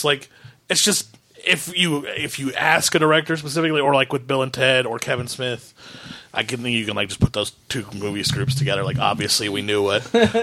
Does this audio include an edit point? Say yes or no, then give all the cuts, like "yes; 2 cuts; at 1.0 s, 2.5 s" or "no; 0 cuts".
no; 0 cuts